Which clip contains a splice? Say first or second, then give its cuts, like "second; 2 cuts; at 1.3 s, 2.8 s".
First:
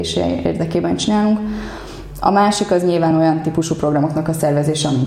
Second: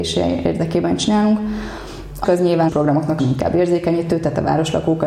second; 3 cuts; at 2.2 s, 2.7 s, 3.2 s